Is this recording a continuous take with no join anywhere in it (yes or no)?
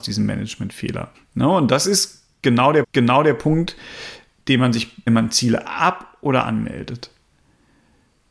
no